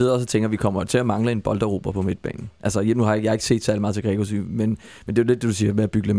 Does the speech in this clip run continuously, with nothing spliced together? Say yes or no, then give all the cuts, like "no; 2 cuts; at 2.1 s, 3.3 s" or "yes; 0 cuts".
yes; 0 cuts